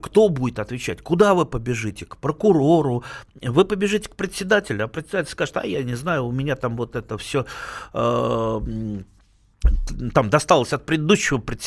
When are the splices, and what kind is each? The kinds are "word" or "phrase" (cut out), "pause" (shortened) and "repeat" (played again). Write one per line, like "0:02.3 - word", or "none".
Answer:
none